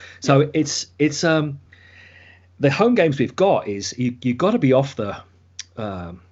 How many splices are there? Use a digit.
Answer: 0